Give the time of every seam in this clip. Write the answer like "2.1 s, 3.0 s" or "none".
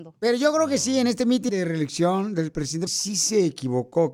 1.5 s, 2.9 s